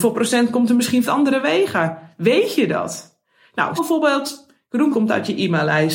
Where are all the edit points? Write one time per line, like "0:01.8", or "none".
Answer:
0:01.1
0:03.8
0:04.9